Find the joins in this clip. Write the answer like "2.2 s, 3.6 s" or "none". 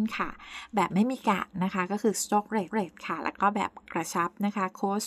2.7 s